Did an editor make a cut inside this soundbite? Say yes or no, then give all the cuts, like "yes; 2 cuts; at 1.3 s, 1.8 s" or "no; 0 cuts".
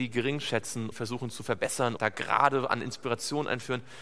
yes; 2 cuts; at 0.9 s, 2.0 s